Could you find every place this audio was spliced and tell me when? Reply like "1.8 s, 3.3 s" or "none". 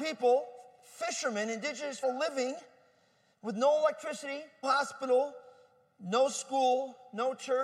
2.0 s, 4.6 s